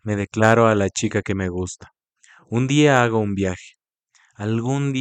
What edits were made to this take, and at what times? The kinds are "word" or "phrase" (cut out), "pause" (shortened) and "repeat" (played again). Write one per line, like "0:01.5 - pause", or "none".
none